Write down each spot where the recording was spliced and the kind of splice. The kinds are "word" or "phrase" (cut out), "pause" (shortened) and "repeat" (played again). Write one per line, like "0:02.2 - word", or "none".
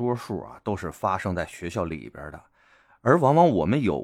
none